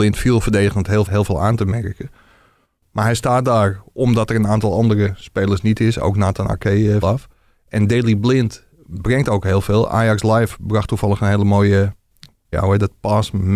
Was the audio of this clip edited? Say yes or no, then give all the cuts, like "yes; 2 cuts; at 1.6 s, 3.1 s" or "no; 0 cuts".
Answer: yes; 3 cuts; at 1.1 s, 7.0 s, 12.5 s